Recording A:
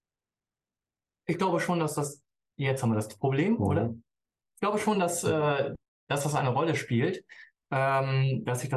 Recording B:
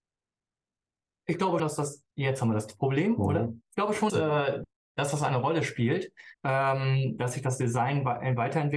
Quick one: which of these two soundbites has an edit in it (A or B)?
B